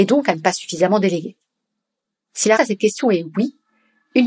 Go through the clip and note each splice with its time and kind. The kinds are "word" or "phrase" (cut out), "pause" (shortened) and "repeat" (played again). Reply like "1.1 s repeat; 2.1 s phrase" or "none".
2.6 s word